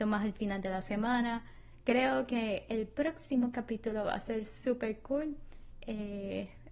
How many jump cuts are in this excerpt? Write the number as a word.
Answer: zero